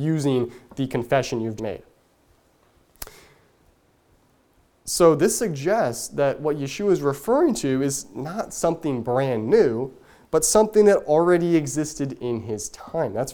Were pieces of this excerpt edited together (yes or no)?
yes